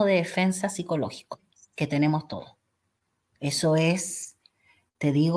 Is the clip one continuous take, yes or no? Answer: yes